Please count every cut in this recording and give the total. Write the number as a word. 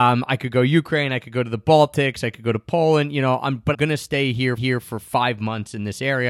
two